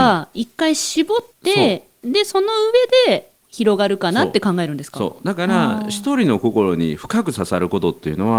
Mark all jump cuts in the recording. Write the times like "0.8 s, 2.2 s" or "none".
1.3 s, 3.4 s